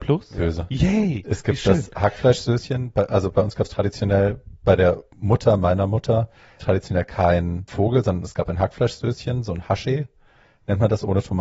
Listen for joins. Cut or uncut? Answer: cut